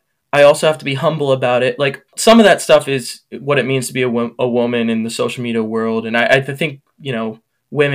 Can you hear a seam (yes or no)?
yes